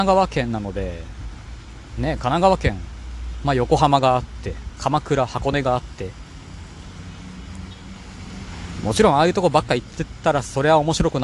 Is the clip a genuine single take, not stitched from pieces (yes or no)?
yes